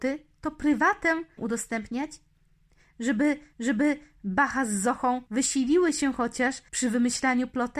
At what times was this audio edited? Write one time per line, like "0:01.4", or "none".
0:01.4
0:03.5
0:05.3
0:06.7